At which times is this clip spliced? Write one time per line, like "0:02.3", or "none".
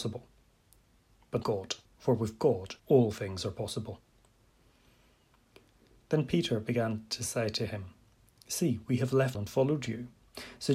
0:01.4
0:01.8
0:02.8
0:09.3